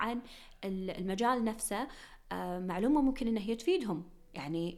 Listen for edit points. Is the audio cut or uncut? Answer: uncut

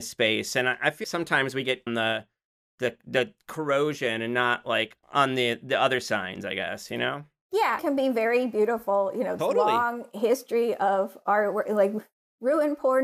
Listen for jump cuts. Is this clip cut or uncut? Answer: cut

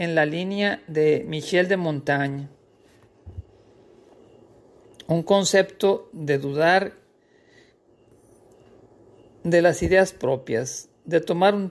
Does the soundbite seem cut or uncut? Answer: uncut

